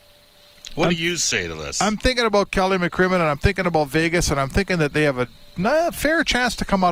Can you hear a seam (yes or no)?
no